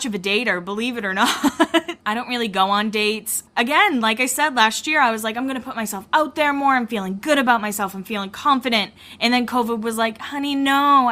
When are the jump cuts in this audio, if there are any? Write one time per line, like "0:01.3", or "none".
none